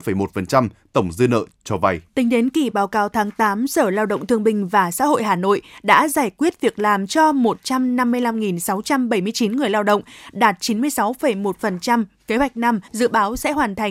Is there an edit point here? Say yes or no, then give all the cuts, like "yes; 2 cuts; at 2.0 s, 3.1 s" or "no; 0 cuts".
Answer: yes; 2 cuts; at 2.1 s, 12.9 s